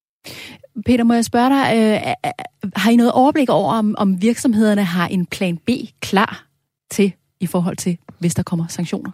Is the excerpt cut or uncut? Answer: uncut